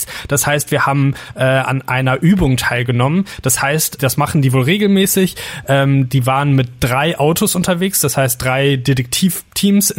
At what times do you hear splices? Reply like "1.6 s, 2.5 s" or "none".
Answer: 4.0 s